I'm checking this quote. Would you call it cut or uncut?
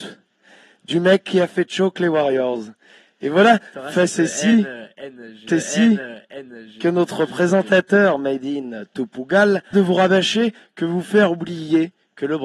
cut